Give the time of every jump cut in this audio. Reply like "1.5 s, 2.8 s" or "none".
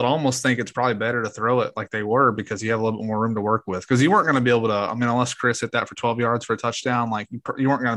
none